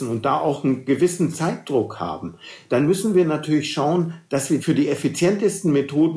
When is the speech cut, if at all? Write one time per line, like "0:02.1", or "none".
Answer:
none